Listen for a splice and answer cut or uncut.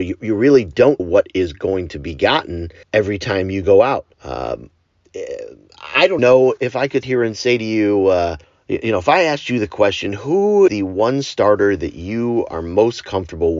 cut